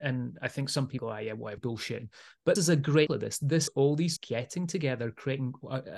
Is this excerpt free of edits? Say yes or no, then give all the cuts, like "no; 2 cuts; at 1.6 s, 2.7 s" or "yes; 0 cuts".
no; 6 cuts; at 1.0 s, 1.6 s, 2.6 s, 3.1 s, 3.7 s, 4.2 s